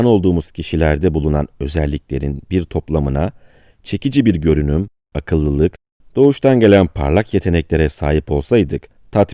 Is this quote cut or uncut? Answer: uncut